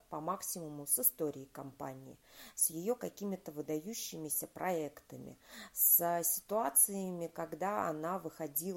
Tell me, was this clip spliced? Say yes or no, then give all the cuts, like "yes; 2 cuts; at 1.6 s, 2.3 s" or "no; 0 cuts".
no; 0 cuts